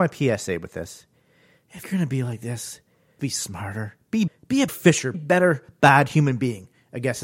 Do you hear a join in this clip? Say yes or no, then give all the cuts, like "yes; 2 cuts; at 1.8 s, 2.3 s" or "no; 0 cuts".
yes; 5 cuts; at 1.8 s, 3.2 s, 4.3 s, 4.7 s, 5.1 s